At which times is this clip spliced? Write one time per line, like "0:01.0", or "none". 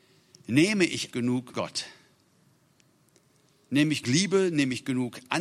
0:01.1
0:01.5
0:04.0